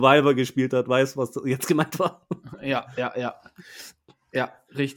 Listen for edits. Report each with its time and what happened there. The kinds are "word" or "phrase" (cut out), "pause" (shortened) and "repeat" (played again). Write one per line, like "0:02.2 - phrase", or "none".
none